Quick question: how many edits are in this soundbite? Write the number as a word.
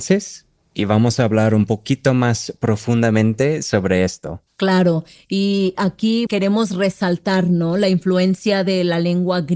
two